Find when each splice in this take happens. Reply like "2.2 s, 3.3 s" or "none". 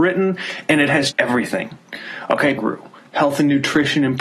1.1 s, 2.6 s